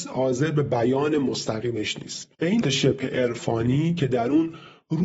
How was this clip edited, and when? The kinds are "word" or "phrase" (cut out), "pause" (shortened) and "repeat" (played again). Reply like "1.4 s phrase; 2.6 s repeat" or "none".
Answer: 2.6 s word